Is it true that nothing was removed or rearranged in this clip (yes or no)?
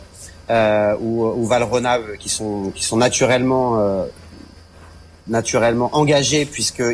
yes